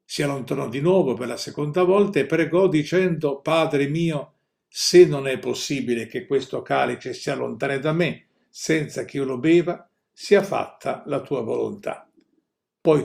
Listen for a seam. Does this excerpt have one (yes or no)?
no